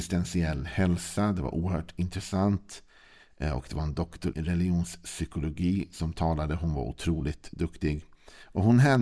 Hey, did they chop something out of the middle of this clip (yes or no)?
yes